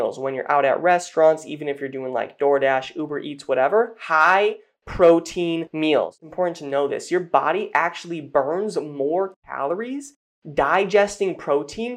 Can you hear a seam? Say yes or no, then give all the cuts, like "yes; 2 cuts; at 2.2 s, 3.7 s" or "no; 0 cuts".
no; 0 cuts